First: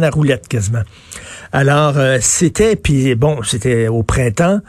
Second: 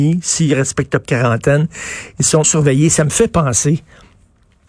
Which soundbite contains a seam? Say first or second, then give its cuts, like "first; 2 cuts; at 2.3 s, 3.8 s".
second; 2 cuts; at 1.0 s, 2.4 s